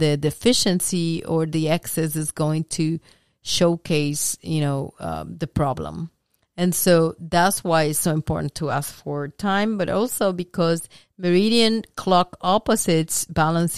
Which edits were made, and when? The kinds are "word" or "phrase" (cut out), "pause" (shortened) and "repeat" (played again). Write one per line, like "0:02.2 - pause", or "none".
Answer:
none